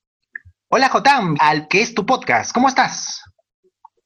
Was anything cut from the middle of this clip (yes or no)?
yes